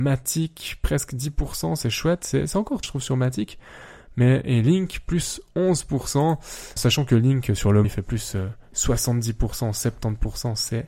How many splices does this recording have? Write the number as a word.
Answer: three